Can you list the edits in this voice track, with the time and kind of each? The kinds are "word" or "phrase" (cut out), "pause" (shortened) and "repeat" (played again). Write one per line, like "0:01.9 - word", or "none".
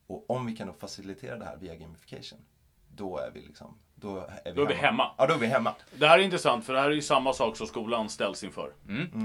none